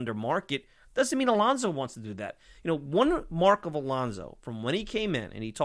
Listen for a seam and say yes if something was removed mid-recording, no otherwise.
no